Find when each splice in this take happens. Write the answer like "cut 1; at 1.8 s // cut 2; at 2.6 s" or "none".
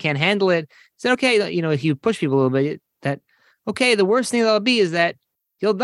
none